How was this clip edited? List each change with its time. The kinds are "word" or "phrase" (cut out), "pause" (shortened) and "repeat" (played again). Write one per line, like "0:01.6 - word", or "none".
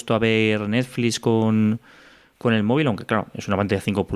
none